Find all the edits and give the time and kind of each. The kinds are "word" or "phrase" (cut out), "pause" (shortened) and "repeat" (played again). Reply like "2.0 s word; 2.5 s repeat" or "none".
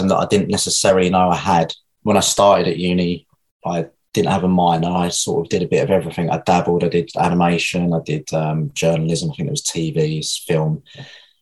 none